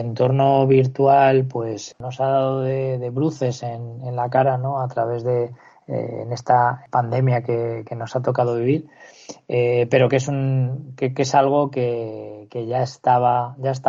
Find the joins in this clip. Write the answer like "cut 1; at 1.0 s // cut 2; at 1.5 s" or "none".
none